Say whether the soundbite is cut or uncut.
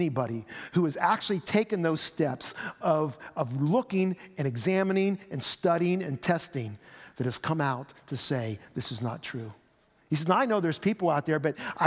uncut